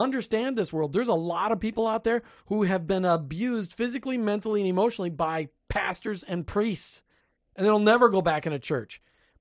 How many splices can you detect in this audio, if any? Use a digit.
1